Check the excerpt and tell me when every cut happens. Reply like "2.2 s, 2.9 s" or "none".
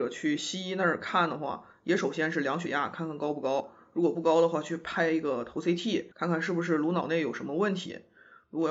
6.1 s